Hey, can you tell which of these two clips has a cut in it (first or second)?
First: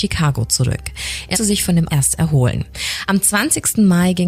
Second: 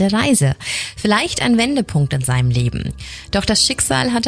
first